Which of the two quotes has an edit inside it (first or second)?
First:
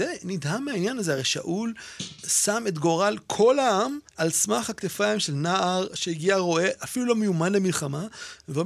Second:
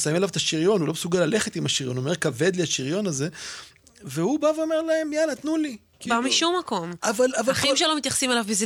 first